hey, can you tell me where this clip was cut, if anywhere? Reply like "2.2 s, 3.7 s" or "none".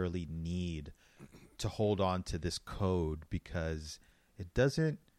none